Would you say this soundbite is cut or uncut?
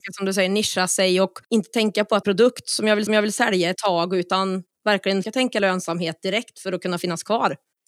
cut